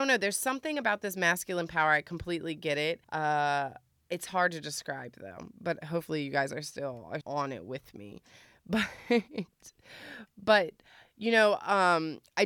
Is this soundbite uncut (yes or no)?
no